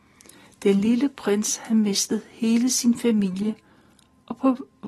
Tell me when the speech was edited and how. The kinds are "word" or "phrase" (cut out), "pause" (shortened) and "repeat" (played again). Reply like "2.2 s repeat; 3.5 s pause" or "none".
none